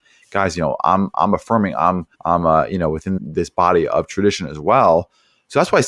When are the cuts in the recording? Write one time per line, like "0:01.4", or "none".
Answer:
0:02.1
0:03.2